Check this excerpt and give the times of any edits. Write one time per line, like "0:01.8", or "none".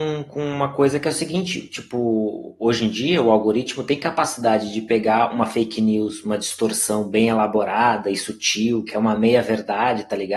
none